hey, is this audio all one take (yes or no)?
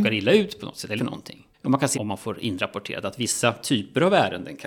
no